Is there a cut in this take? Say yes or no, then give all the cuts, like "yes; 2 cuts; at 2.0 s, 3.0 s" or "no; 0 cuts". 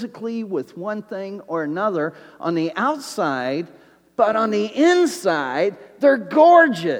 no; 0 cuts